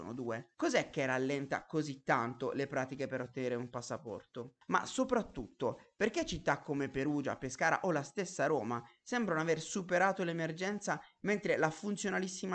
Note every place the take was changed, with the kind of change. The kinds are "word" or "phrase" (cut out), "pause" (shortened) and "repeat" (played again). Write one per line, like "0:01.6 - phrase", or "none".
none

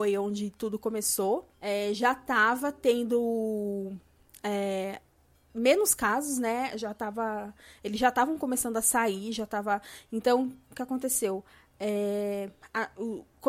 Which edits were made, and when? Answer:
0:01.5 - pause

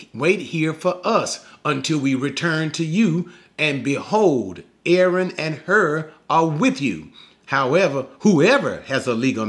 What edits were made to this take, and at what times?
none

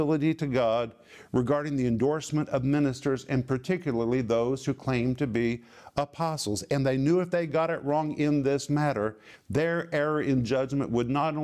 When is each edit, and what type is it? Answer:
none

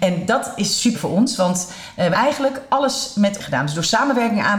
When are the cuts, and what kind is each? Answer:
0:00.9 - phrase
0:02.1 - word
0:03.4 - phrase

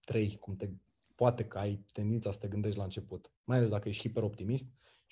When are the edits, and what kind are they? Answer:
0:03.4 - pause

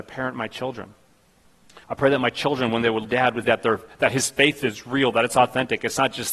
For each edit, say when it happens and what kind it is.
0:01.8 - pause
0:03.0 - phrase
0:03.4 - word

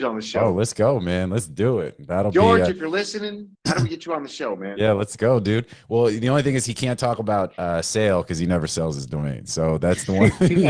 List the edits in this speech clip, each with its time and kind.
0:03.5 - pause

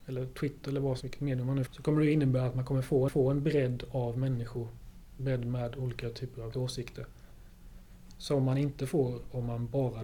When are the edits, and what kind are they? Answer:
0:01.0 - word
0:01.7 - word
0:03.1 - repeat
0:06.5 - word

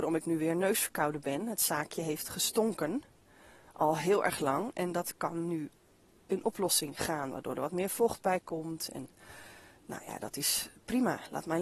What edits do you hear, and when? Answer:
none

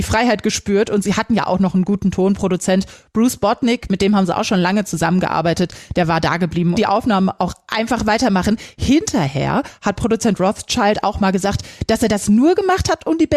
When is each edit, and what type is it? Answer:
0:06.7 - phrase

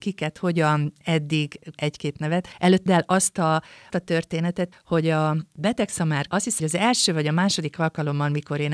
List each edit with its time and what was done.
0:01.7 - word
0:02.9 - word
0:03.9 - word
0:04.7 - word
0:06.3 - word
0:06.6 - word

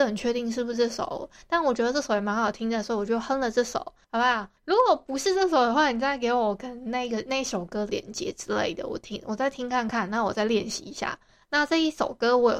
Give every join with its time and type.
0:07.9 - word

